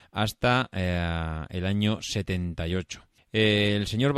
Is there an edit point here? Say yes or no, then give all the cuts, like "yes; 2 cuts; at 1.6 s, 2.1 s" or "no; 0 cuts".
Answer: yes; 1 cut; at 3.2 s